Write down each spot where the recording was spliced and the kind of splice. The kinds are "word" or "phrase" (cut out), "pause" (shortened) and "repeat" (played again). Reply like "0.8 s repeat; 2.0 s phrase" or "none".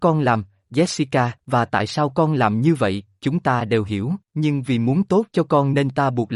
1.4 s pause; 4.3 s pause

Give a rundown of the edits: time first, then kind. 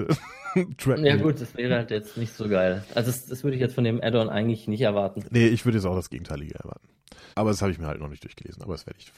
7.3 s pause

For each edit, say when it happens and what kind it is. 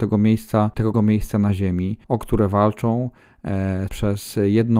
0.9 s word; 2.0 s pause; 3.9 s word

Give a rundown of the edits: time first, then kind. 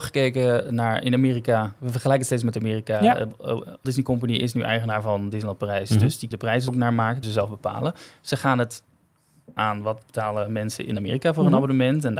3.8 s word; 6.3 s word; 6.7 s word; 7.2 s word; 9.6 s word

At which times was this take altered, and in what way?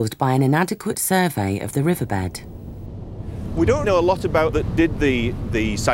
3.8 s word; 4.5 s phrase

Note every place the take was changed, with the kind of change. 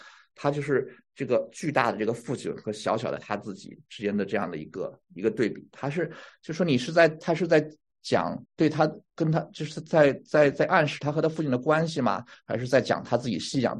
8.4 s pause

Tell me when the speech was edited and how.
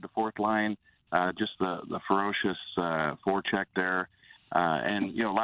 none

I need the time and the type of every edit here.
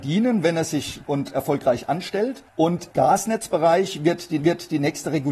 1.0 s word; 2.9 s word; 4.4 s repeat

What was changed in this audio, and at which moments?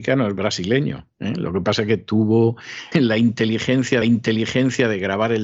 2.9 s word; 4.0 s repeat

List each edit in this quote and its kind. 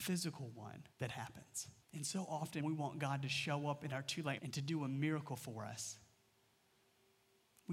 0.9 s pause; 1.8 s pause; 2.6 s word; 4.4 s word

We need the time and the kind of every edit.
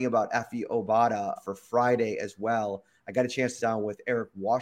1.4 s word; 3.6 s word

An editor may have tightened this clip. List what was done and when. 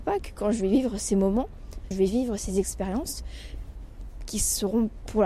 1.9 s word

